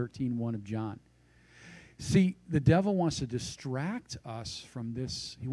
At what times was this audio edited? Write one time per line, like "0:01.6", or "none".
none